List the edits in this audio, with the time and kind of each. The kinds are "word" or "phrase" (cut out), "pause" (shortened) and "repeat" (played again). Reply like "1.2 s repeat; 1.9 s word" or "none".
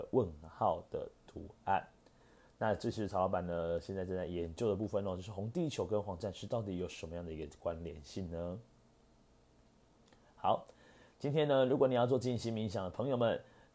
none